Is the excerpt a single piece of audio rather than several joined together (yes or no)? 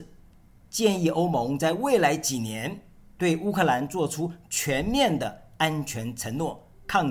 yes